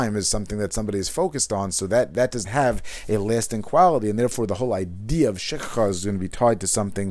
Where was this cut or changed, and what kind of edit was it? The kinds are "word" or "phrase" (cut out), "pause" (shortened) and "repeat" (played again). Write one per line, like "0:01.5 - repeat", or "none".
0:02.4 - word